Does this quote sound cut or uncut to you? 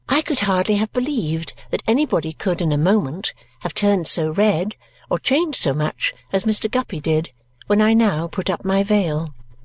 uncut